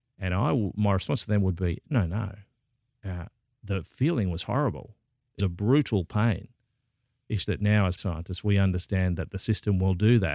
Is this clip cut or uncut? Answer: cut